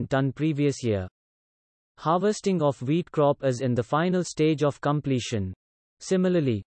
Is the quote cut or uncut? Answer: uncut